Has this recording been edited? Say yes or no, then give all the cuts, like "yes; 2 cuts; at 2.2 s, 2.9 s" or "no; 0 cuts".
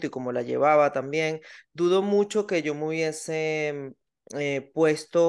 no; 0 cuts